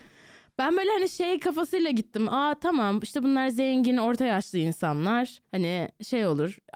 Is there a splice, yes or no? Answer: yes